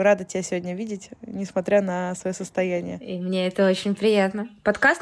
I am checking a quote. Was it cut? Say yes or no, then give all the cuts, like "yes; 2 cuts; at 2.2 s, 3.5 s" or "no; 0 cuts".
no; 0 cuts